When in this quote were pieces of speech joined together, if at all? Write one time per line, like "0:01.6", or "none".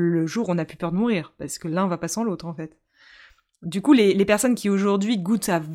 none